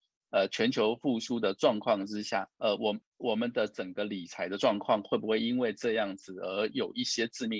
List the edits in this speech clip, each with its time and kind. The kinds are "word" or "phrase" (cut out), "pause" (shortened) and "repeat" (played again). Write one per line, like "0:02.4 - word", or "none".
0:02.5 - pause
0:03.0 - pause